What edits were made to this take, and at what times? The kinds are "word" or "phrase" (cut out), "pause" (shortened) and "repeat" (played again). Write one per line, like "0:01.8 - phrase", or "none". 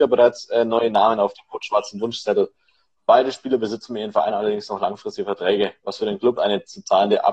0:06.4 - word